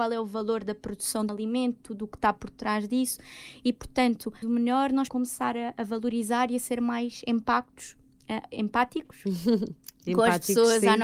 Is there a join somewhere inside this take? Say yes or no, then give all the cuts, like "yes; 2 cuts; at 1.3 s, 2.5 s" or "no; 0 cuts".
yes; 3 cuts; at 1.3 s, 4.4 s, 5.1 s